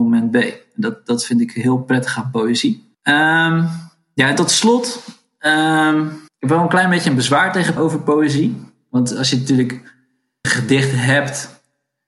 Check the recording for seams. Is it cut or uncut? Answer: cut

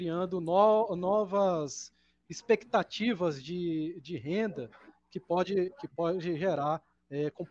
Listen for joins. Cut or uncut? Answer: uncut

